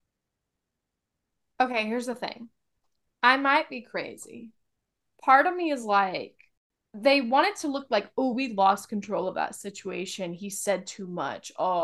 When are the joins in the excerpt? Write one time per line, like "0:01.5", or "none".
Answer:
none